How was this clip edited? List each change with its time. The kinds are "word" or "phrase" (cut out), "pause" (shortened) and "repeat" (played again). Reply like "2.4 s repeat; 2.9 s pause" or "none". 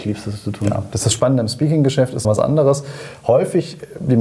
2.2 s word